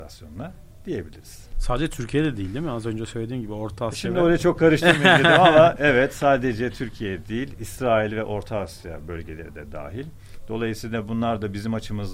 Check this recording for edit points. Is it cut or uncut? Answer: uncut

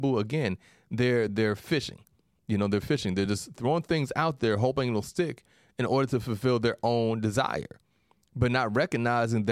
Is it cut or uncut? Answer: uncut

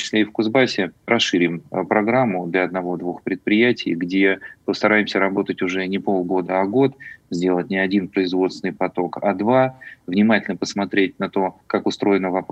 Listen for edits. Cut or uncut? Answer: cut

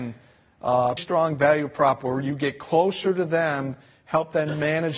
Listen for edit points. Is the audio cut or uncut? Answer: cut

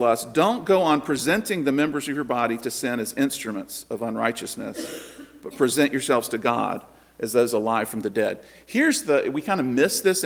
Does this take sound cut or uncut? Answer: uncut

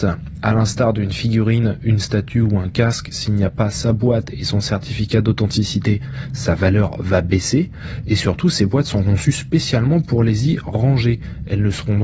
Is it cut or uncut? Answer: uncut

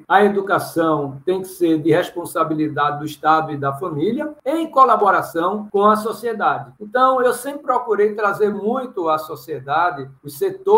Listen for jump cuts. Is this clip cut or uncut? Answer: uncut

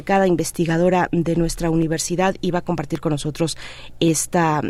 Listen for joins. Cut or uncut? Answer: uncut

